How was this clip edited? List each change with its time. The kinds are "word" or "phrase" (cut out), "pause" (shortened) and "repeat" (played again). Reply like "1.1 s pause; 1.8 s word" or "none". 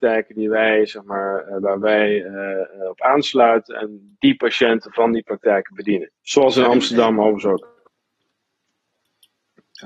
6.2 s pause